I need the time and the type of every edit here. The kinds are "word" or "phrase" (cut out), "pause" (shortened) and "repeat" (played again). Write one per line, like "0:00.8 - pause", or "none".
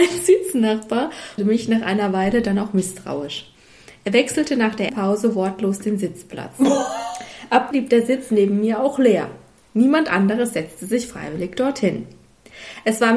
0:01.4 - word
0:04.9 - word
0:07.7 - word